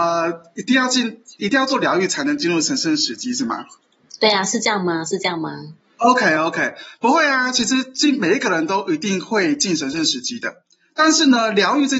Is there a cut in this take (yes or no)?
no